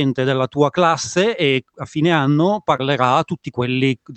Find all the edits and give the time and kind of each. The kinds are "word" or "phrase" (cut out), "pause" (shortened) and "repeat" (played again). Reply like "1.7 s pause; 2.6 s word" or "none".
none